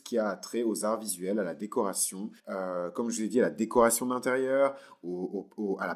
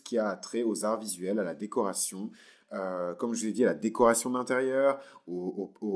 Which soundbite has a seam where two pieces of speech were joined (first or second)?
first